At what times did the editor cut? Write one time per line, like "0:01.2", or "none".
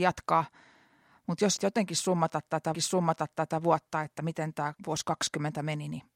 0:01.6
0:02.7
0:04.8